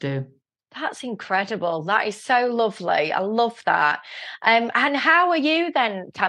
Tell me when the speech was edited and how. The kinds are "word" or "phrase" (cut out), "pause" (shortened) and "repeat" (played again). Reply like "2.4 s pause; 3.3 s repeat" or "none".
4.7 s word